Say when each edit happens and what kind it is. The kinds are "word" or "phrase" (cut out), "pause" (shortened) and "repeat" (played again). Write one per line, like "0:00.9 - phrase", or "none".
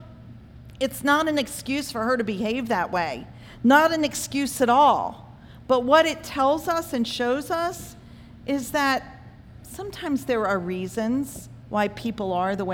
0:11.6 - pause